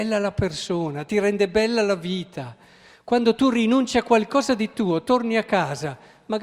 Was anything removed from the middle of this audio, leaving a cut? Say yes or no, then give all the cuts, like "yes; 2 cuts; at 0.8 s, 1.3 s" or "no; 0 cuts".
no; 0 cuts